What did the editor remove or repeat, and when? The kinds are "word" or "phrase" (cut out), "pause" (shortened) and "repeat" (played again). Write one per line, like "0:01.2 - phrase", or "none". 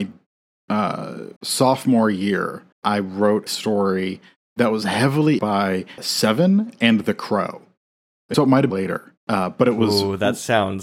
0:01.4 - pause
0:02.7 - pause
0:03.5 - word
0:05.4 - word
0:06.0 - word
0:08.3 - word
0:08.7 - word
0:09.2 - pause